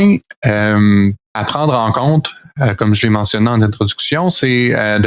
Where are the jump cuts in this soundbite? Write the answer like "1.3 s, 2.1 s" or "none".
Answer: 1.4 s